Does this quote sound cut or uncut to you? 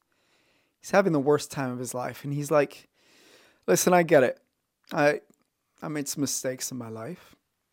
uncut